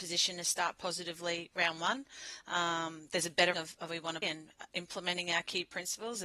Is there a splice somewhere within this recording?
yes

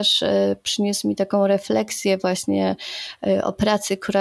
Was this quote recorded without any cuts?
yes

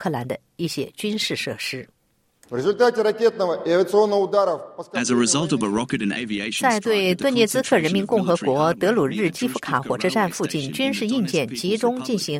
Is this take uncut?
yes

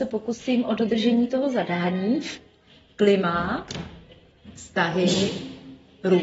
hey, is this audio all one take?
yes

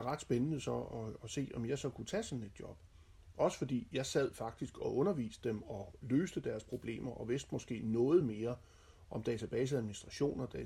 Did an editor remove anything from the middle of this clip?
no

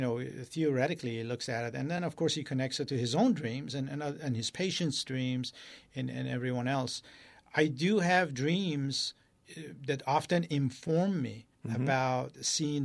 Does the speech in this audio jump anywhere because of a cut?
yes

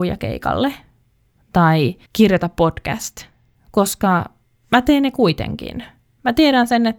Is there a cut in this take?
yes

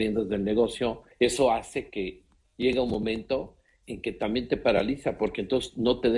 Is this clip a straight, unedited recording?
no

